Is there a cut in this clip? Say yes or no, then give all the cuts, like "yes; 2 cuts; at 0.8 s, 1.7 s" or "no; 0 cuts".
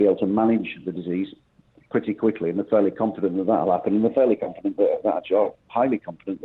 no; 0 cuts